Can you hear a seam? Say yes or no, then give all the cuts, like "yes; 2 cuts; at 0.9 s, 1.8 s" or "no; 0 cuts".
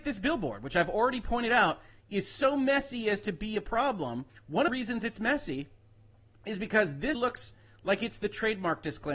yes; 2 cuts; at 4.7 s, 7.1 s